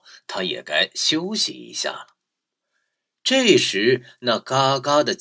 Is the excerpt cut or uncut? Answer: uncut